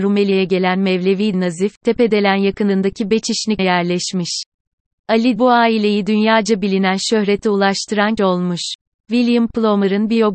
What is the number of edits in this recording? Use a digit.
4